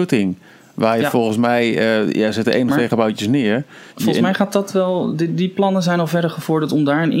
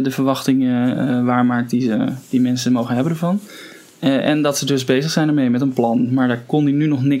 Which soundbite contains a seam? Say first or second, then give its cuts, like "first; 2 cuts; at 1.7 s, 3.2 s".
first; 1 cut; at 3.9 s